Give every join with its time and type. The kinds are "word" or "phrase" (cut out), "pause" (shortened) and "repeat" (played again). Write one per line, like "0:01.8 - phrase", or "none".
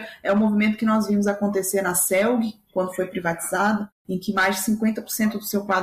none